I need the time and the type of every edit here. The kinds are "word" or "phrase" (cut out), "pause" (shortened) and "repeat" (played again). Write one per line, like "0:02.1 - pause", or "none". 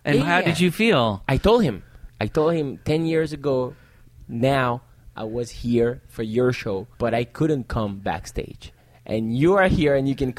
0:02.1 - pause
0:06.9 - pause